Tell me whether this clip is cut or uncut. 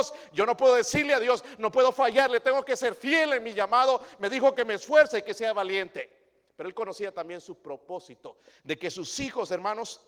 uncut